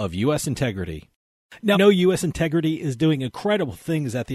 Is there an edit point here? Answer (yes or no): yes